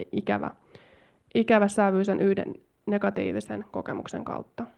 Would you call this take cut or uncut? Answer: uncut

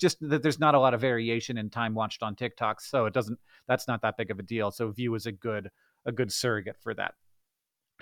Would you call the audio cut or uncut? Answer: uncut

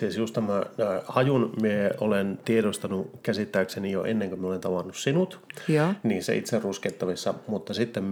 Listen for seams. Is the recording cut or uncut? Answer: uncut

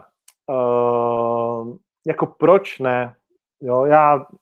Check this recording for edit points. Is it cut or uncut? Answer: uncut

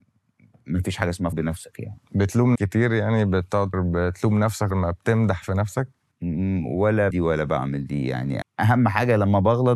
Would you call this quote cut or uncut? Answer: cut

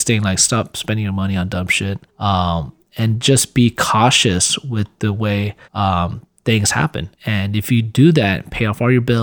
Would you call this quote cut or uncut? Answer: cut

